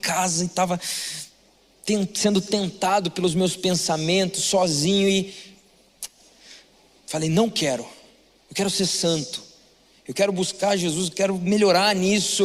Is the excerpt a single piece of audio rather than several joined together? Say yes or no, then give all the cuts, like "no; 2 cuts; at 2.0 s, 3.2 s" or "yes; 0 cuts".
yes; 0 cuts